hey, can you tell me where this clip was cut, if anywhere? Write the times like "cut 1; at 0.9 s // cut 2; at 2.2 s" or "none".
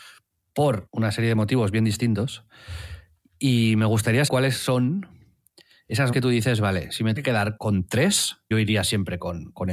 cut 1; at 4.3 s // cut 2; at 6.1 s // cut 3; at 7.2 s // cut 4; at 7.6 s // cut 5; at 8.5 s